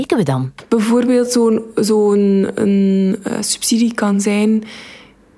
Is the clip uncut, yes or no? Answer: yes